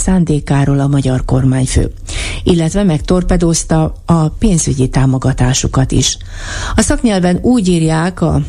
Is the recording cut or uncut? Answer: uncut